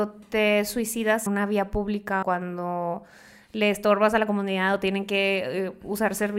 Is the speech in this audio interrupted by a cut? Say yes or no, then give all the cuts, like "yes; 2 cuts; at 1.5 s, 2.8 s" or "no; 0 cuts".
yes; 2 cuts; at 1.3 s, 2.2 s